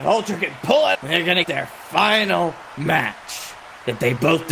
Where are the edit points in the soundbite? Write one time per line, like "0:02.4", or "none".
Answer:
0:00.9
0:01.4